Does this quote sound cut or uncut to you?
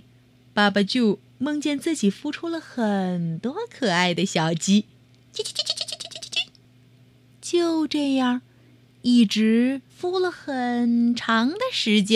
cut